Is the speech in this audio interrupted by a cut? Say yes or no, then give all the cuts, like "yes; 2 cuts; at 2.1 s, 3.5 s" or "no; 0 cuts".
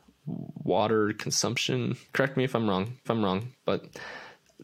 yes; 2 cuts; at 2.1 s, 3.0 s